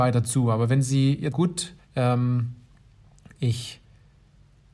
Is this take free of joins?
no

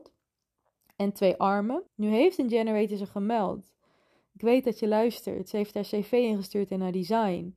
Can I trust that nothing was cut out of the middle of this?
no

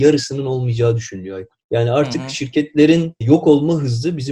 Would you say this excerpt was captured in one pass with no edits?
yes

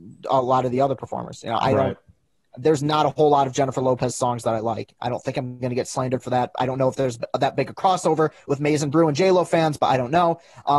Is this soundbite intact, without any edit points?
yes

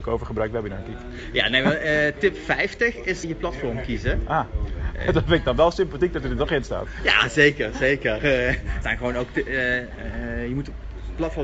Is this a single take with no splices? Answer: no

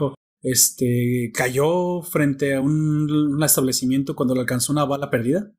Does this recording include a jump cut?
no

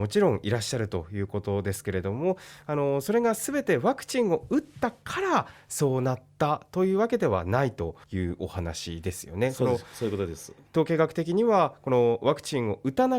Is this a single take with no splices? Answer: no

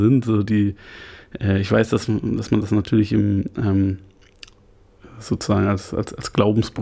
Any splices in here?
no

